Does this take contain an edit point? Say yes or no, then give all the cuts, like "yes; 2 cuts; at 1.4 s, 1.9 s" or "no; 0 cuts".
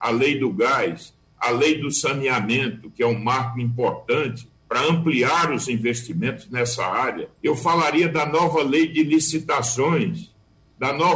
yes; 2 cuts; at 4.6 s, 7.3 s